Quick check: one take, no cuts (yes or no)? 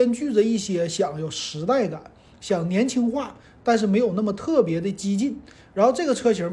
yes